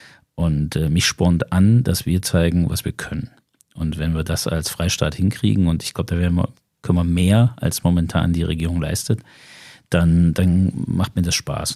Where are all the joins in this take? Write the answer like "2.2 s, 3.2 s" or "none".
none